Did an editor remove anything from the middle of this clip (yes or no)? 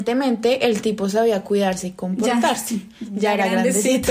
no